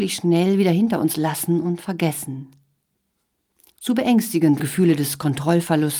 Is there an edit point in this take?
yes; 1 cut; at 4.6 s

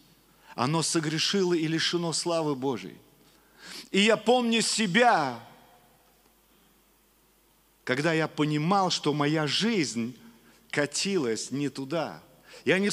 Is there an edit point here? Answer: no; 0 cuts

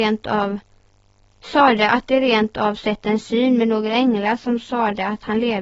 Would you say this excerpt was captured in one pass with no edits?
yes; 0 cuts

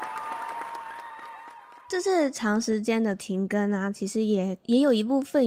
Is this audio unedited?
yes; 0 cuts

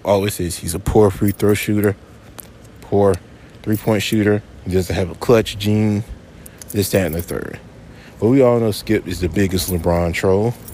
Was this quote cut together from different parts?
no; 0 cuts

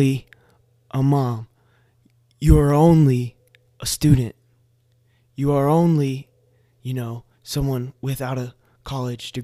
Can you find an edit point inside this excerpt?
no; 0 cuts

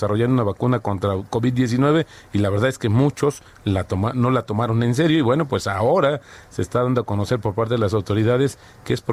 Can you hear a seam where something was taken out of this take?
no; 0 cuts

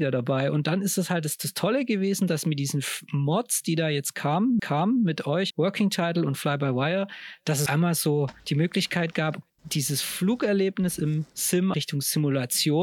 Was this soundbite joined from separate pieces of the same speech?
yes; 5 cuts; at 4.6 s, 5.5 s, 7.7 s, 8.4 s, 11.7 s

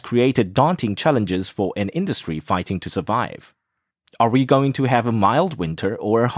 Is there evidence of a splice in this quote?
no; 0 cuts

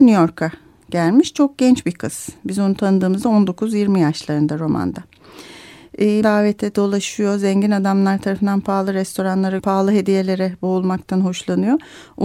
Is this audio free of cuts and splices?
no; 2 cuts; at 6.2 s, 9.6 s

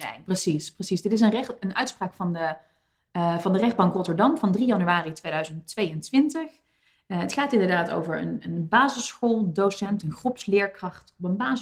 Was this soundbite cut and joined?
no; 0 cuts

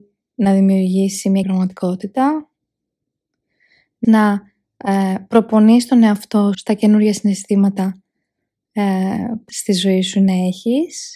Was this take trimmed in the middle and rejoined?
yes; 4 cuts; at 1.4 s, 4.0 s, 6.5 s, 9.5 s

